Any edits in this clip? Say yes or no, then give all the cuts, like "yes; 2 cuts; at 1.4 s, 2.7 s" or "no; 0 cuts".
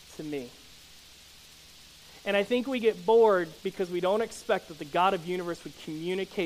yes; 1 cut; at 3.6 s